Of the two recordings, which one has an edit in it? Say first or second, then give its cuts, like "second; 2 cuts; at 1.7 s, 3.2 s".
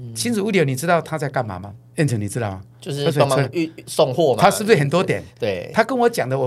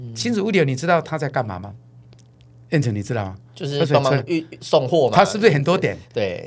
first; 1 cut; at 1.9 s